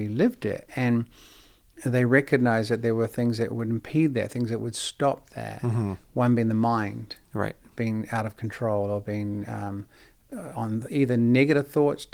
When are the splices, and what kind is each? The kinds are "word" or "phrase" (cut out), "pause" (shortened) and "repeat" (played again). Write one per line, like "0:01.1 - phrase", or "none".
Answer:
none